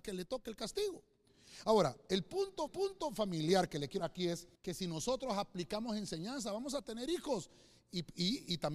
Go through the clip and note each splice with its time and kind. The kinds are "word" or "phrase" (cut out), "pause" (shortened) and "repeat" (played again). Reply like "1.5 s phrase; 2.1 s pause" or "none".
2.7 s repeat; 4.0 s word; 4.5 s pause

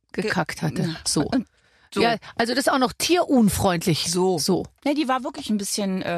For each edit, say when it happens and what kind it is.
none

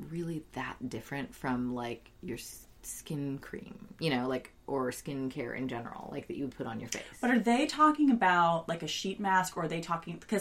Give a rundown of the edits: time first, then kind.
2.8 s pause

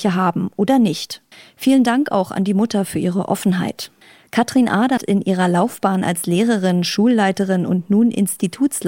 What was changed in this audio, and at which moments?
1.3 s pause; 4.0 s pause; 5.0 s word

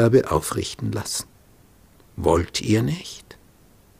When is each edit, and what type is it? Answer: none

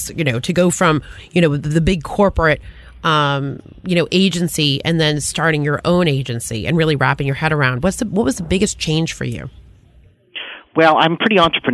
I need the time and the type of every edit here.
none

